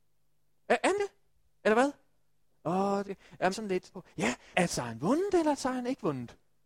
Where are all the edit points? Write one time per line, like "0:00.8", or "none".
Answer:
0:01.0
0:02.4
0:03.0
0:03.5
0:03.9
0:04.5